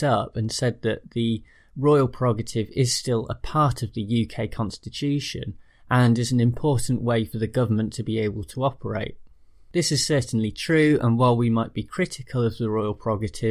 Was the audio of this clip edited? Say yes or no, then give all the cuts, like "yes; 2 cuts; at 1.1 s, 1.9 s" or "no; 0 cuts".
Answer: no; 0 cuts